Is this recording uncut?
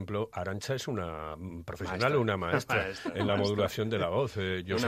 yes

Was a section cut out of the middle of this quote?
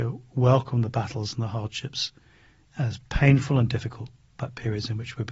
no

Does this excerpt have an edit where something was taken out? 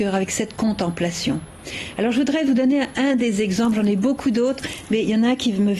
no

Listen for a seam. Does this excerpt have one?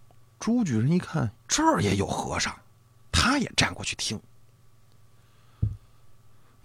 yes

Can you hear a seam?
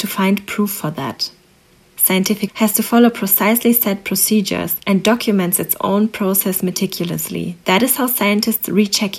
yes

